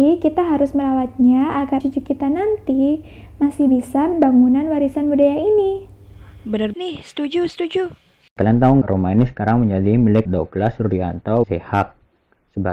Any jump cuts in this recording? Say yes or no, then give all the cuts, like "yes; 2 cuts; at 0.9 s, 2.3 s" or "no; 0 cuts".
yes; 6 cuts; at 1.8 s, 4.1 s, 6.7 s, 8.8 s, 10.3 s, 11.4 s